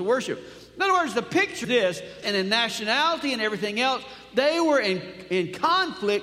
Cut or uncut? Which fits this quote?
cut